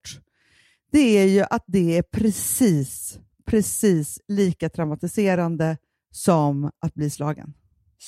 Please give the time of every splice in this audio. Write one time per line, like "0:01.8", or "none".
none